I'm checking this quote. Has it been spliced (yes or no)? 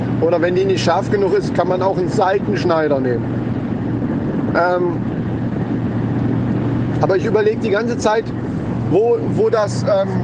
no